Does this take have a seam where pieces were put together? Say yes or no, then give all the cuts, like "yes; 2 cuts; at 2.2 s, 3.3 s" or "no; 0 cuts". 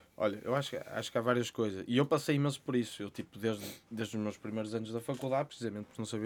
no; 0 cuts